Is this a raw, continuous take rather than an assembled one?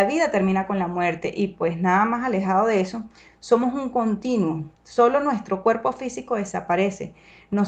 no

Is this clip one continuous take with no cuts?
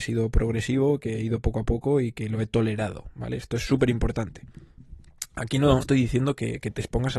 no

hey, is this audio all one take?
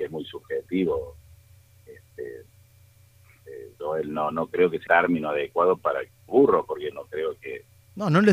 no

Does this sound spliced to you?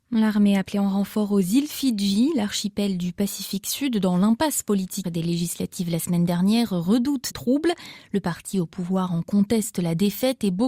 yes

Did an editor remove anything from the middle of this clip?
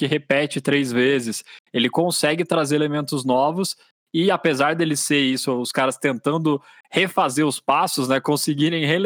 no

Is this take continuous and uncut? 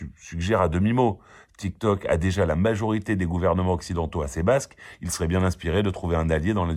yes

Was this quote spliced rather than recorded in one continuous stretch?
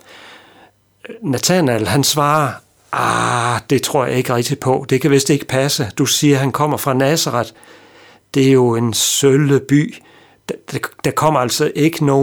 no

